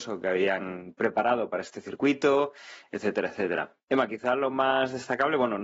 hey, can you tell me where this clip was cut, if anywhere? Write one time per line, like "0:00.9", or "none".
0:03.8